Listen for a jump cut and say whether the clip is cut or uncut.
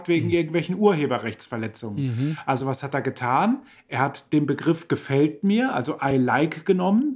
uncut